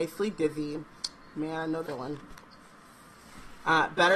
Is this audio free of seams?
no; 1 cut; at 1.8 s

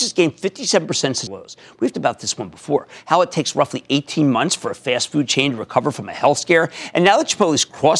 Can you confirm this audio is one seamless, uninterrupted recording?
no; 2 cuts; at 1.3 s, 1.9 s

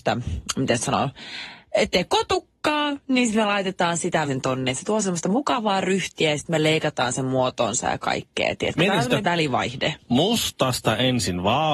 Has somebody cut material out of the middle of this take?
yes; 2 cuts; at 4.3 s, 9.2 s

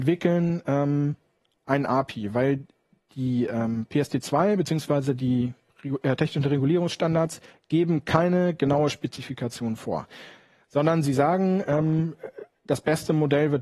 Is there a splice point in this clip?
no; 0 cuts

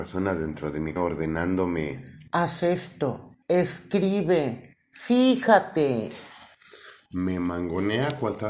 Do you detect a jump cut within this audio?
yes; 2 cuts; at 1.0 s, 3.4 s

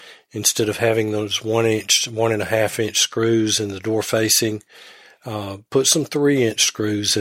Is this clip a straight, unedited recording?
yes; 0 cuts

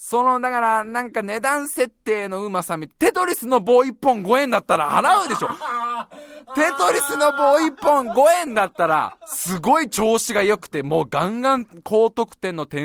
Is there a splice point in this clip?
no; 0 cuts

